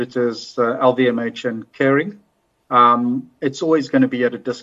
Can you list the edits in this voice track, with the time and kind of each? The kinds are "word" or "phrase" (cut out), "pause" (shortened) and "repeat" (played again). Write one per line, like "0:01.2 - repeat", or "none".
none